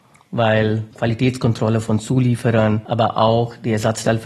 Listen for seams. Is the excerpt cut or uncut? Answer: cut